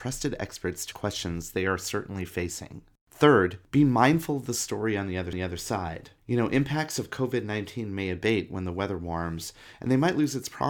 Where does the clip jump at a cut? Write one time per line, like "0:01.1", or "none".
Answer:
0:00.9
0:05.3